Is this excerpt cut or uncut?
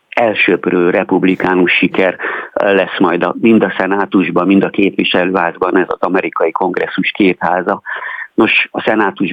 uncut